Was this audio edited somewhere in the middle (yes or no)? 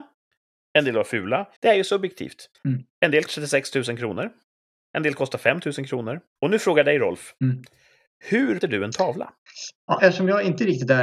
yes